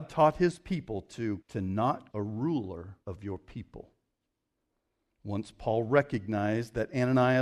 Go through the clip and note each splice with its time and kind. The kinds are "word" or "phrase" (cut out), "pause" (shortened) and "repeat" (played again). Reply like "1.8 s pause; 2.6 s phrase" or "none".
1.4 s word; 2.1 s word; 3.0 s pause